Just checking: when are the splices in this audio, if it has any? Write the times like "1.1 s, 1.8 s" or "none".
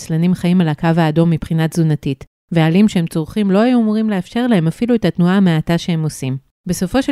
none